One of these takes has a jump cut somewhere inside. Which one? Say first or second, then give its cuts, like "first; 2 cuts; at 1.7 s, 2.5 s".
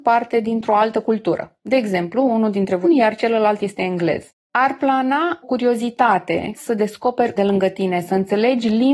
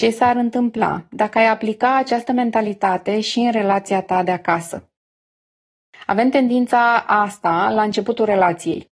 first; 5 cuts; at 2.8 s, 4.4 s, 5.4 s, 6.6 s, 7.4 s